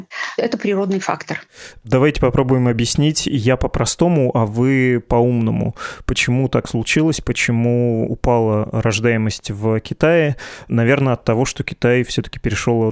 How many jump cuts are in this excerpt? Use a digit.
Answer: 0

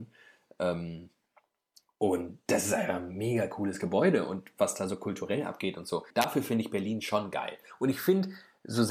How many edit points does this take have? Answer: 1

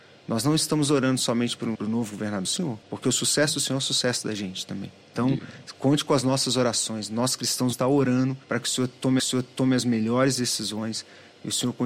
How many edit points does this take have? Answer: 7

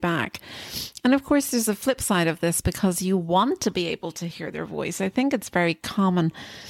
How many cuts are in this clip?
0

